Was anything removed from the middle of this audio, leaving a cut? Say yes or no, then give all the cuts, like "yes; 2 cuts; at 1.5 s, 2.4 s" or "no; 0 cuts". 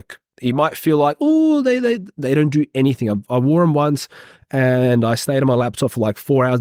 no; 0 cuts